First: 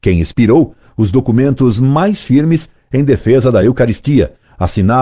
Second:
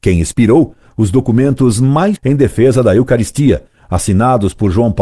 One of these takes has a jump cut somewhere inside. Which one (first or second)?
second